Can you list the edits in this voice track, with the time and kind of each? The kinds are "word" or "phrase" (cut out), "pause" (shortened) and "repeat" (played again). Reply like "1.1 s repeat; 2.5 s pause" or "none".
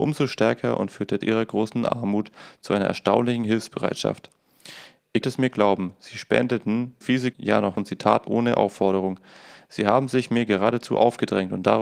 1.2 s word; 5.2 s word; 7.0 s word; 7.3 s word; 7.8 s word; 8.3 s word

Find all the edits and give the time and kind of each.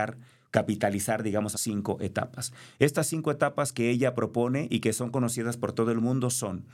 1.5 s phrase

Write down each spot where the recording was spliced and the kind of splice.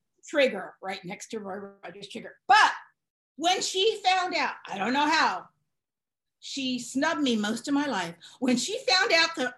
none

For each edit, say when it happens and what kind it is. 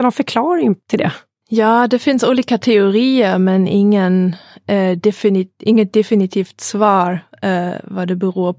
none

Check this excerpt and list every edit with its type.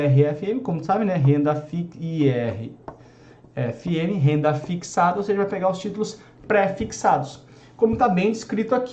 none

